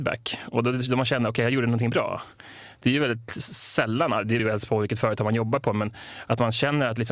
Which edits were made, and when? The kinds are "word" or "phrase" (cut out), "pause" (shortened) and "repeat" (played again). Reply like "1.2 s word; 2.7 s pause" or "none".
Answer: 4.4 s word